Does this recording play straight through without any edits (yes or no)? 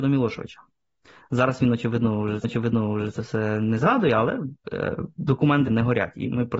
no